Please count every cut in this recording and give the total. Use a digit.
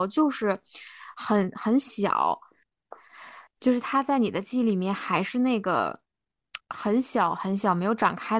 2